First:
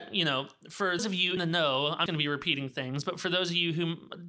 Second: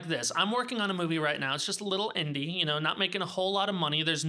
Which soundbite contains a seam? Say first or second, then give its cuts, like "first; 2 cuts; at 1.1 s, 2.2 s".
first; 3 cuts; at 1.0 s, 1.4 s, 2.1 s